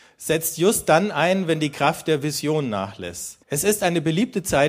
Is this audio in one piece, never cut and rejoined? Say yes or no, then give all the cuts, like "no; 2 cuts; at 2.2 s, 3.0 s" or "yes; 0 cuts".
no; 1 cut; at 3.4 s